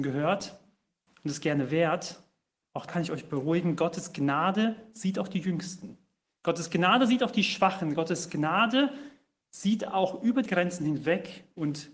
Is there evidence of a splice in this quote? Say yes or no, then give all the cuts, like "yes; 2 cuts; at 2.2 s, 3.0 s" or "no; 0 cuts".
yes; 2 cuts; at 2.9 s, 10.5 s